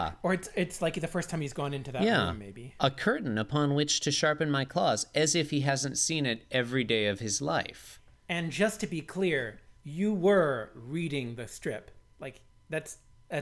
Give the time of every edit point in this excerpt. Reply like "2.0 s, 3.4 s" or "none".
9.8 s